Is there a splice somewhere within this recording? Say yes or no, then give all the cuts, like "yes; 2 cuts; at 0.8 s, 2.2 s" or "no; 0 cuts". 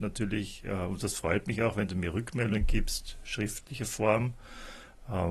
no; 0 cuts